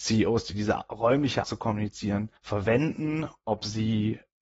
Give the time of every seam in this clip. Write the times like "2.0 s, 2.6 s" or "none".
1.4 s, 2.4 s

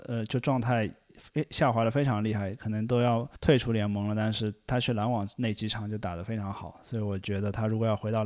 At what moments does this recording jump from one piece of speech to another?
3.4 s

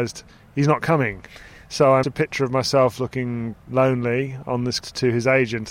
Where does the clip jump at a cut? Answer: 2.0 s, 3.5 s, 4.8 s

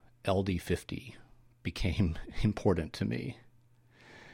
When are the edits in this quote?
none

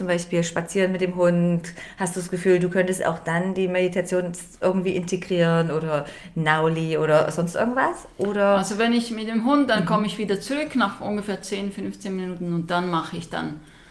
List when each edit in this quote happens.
none

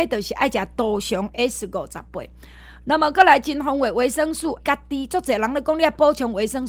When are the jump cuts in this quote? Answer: 4.6 s

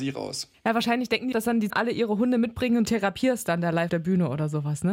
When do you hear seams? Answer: 1.3 s, 1.7 s, 2.8 s, 3.9 s

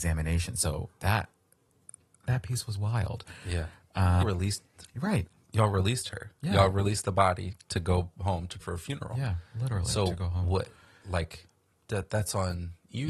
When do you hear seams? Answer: 4.2 s, 7.6 s, 8.6 s

